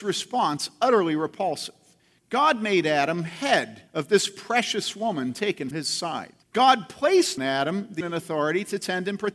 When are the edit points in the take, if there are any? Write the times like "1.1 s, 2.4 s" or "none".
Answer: 2.0 s, 3.9 s, 5.7 s, 6.4 s, 7.4 s, 8.0 s